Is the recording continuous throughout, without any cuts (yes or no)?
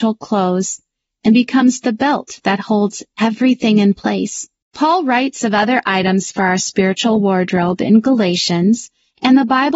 no